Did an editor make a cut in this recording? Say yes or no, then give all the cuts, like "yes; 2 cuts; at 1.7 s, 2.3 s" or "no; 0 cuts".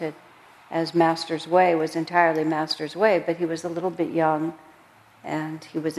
no; 0 cuts